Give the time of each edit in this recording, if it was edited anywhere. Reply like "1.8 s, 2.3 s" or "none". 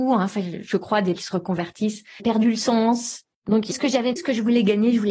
1.2 s, 2.2 s, 3.7 s, 4.2 s